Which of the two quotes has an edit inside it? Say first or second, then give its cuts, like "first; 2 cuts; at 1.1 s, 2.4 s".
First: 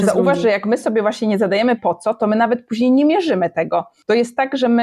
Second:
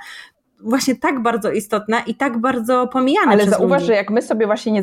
first; 1 cut; at 1.8 s